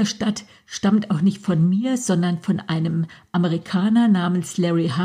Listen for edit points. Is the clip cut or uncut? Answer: uncut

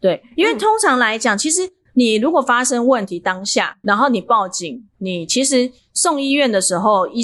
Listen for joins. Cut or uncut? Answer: cut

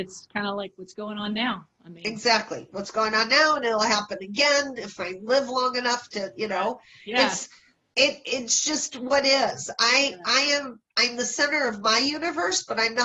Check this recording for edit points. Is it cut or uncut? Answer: uncut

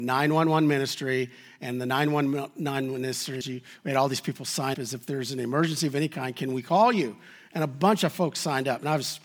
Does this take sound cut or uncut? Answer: cut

